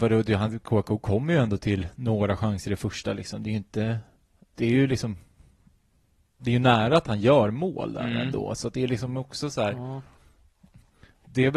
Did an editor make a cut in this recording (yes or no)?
no